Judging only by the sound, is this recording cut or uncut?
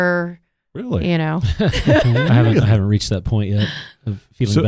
uncut